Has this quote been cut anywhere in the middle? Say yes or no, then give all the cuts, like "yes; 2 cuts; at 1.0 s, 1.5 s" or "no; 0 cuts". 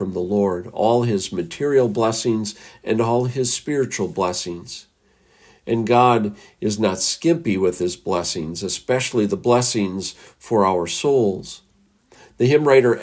no; 0 cuts